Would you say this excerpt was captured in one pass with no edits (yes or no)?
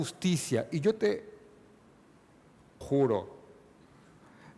no